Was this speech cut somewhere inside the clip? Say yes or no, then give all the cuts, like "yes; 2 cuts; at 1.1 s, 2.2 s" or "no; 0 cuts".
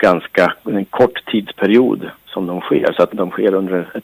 yes; 2 cuts; at 2.2 s, 3.1 s